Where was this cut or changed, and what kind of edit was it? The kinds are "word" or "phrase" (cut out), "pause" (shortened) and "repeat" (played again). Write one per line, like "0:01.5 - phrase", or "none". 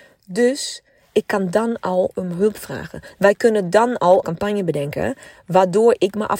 0:04.2 - phrase